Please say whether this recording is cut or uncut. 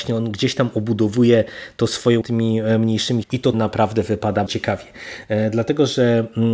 cut